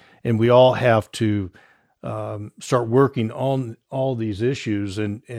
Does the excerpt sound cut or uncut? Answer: uncut